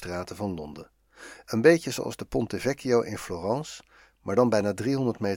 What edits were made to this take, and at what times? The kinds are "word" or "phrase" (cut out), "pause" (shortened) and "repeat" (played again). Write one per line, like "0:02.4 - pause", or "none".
none